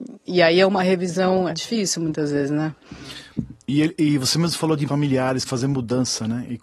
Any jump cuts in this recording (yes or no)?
yes